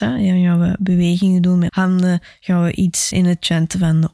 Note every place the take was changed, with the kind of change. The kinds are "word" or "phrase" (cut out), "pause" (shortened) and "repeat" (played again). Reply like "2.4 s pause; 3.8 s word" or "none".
1.7 s word; 3.1 s word